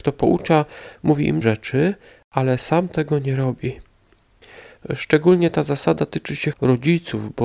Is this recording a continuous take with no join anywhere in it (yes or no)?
no